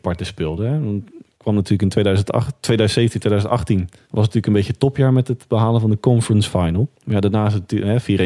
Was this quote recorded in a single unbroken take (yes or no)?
no